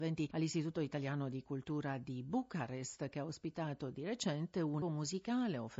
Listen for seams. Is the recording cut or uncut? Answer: cut